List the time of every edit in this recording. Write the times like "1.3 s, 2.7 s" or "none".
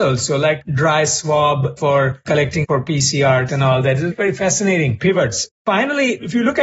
2.6 s, 3.5 s, 4.1 s